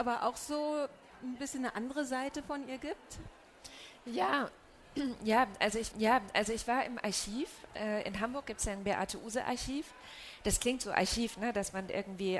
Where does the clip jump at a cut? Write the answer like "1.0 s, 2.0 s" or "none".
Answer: 5.9 s